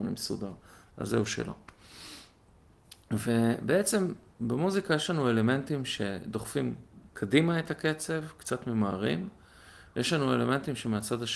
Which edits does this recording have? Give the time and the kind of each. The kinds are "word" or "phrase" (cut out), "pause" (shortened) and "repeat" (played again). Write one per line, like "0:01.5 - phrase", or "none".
0:07.1 - pause